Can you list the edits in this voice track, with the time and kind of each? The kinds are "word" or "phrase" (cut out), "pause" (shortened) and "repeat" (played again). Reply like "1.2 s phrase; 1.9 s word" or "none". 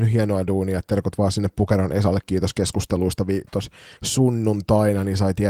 4.0 s pause